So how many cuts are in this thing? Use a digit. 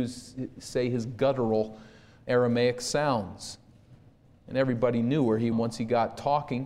1